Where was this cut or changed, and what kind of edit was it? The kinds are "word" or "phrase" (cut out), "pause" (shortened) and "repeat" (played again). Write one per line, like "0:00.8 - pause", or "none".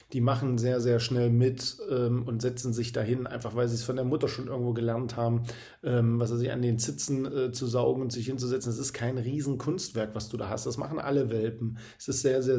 none